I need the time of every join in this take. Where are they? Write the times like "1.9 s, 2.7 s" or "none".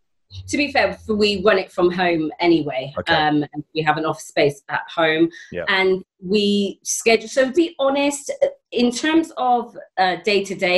7.5 s